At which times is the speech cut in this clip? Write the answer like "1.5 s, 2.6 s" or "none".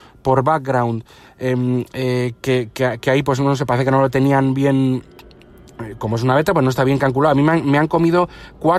none